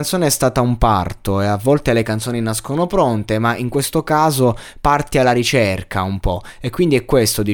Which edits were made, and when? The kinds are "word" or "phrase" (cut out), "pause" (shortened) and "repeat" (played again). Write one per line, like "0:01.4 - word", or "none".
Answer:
none